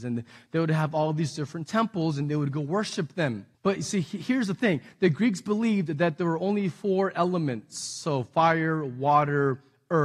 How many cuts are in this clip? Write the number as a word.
one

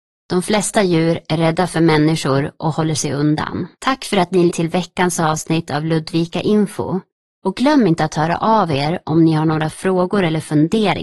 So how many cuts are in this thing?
two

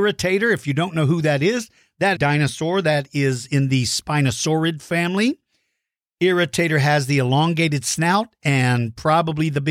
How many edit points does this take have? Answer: one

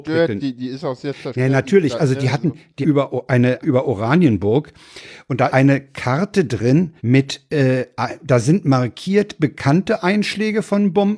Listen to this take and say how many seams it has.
four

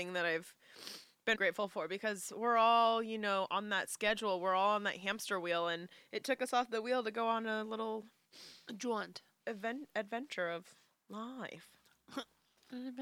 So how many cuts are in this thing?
one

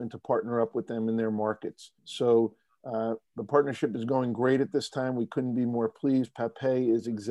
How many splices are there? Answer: two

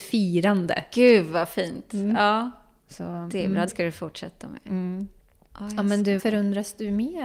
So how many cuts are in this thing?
two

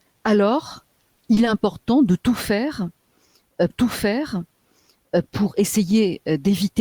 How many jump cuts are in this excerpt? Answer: one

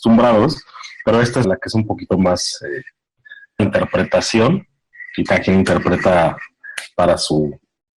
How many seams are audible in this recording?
three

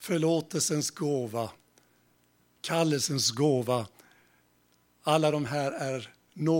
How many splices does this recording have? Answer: zero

